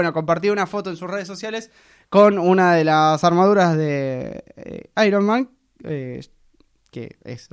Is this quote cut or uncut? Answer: uncut